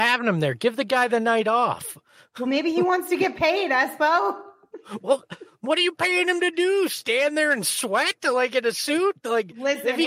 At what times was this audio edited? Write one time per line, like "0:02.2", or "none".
none